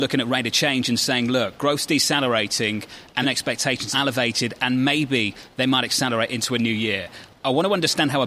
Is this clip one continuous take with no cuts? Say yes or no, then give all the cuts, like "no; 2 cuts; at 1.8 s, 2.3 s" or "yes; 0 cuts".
no; 2 cuts; at 3.2 s, 3.9 s